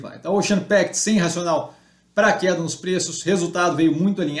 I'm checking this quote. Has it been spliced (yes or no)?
no